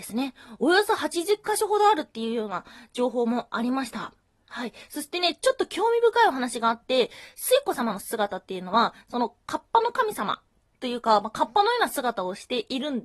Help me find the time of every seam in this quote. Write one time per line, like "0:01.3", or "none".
0:04.4